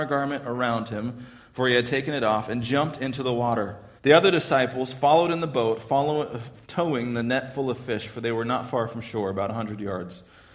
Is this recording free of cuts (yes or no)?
no